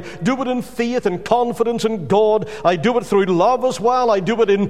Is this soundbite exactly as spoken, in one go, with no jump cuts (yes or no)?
yes